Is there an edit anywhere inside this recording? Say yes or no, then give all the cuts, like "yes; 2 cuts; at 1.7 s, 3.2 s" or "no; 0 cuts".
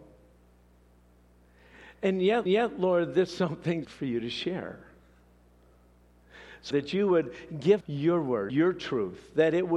yes; 6 cuts; at 2.5 s, 3.3 s, 3.8 s, 6.7 s, 7.8 s, 8.5 s